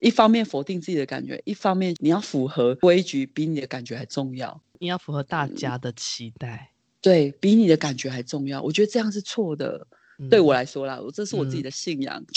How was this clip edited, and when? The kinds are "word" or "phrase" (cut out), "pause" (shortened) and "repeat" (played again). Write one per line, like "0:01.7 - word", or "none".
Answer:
none